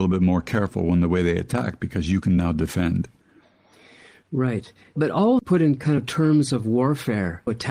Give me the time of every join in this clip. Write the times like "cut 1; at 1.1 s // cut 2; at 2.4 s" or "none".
none